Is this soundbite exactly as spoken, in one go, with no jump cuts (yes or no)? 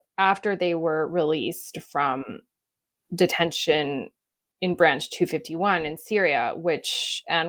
yes